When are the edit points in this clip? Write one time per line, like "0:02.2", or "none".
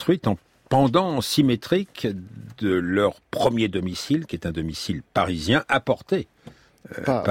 none